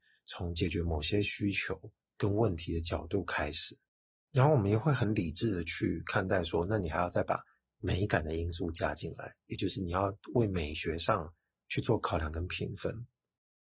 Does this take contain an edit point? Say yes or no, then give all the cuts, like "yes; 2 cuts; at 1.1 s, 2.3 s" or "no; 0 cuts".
no; 0 cuts